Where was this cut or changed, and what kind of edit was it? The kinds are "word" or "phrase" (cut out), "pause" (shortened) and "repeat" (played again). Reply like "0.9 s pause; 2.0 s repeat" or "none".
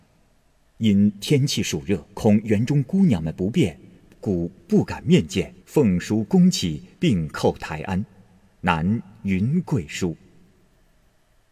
2.1 s pause; 5.6 s pause; 6.9 s pause

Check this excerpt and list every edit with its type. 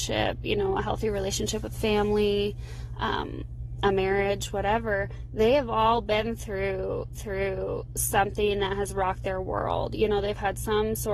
7.1 s repeat

